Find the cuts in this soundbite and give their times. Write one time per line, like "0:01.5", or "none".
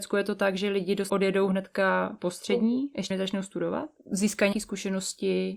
0:01.1
0:03.1
0:04.5